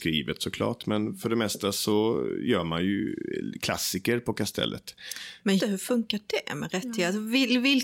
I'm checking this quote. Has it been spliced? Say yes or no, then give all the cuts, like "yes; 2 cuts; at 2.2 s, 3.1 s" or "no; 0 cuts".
yes; 1 cut; at 5.6 s